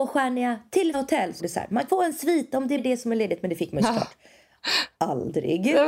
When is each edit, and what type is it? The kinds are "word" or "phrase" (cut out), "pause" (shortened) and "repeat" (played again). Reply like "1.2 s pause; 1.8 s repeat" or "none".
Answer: 0.9 s word; 1.4 s word; 1.9 s word; 2.8 s word